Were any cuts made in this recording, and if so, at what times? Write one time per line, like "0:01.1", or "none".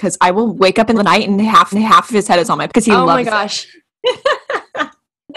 0:00.9
0:01.7
0:02.7